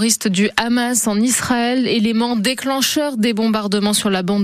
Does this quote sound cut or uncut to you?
uncut